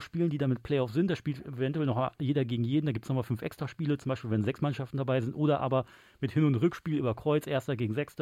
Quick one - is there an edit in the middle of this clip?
no; 0 cuts

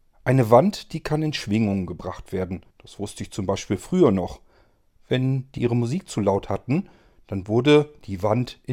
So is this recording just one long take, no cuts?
no; 2 cuts; at 2.7 s, 5.6 s

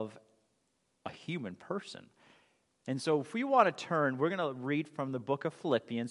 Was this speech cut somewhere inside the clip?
no; 0 cuts

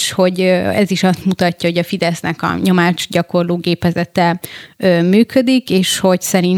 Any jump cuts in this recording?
no; 0 cuts

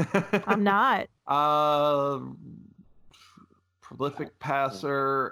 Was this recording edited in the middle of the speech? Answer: no; 0 cuts

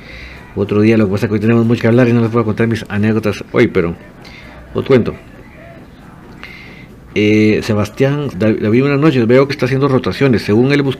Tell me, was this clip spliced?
yes; 4 cuts; at 1.8 s, 4.9 s, 8.3 s, 9.5 s

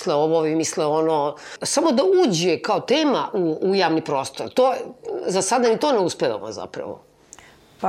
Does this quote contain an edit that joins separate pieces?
no; 0 cuts

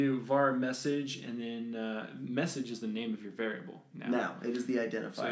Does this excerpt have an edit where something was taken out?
no; 0 cuts

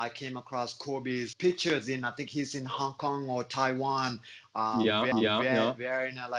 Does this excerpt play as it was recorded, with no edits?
no; 2 cuts; at 1.3 s, 5.1 s

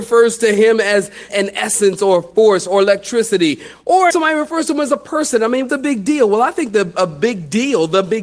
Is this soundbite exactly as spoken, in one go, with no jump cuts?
no; 3 cuts; at 1.3 s, 4.1 s, 5.7 s

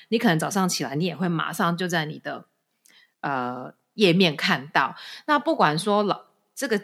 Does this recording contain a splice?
no; 0 cuts

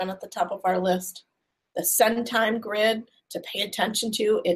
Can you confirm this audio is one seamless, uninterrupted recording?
yes; 0 cuts

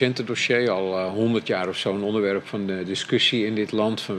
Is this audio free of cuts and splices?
yes; 0 cuts

